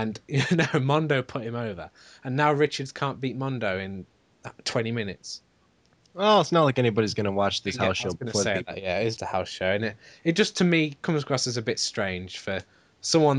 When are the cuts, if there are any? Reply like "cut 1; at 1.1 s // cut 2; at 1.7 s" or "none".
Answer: cut 1; at 9.2 s